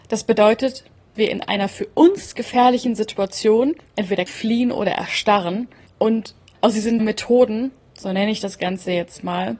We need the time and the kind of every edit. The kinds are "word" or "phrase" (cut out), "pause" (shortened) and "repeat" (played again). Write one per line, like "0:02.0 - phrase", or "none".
0:01.2 - word
0:04.3 - word
0:07.0 - word